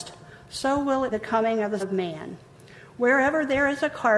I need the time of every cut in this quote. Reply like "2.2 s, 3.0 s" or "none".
1.1 s, 1.8 s

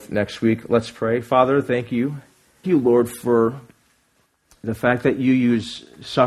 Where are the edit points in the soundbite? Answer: 2.6 s

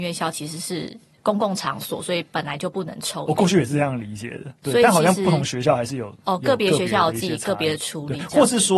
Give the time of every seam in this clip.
none

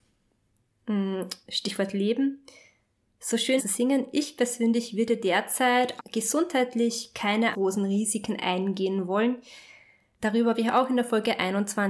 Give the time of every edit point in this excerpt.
3.6 s, 6.0 s, 7.5 s

